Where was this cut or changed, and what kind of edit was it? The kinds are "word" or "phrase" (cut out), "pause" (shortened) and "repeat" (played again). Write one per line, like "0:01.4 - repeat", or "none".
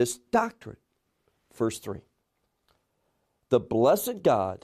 none